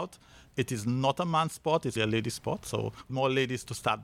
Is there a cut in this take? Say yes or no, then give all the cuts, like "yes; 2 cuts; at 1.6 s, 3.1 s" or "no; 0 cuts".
yes; 2 cuts; at 2.0 s, 3.1 s